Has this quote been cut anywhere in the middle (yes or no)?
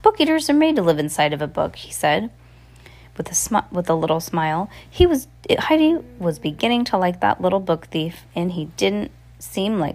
no